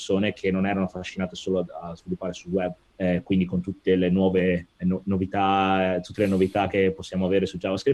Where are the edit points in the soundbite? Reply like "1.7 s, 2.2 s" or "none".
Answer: 2.8 s